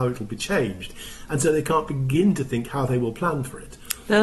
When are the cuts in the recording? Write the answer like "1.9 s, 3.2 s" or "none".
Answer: none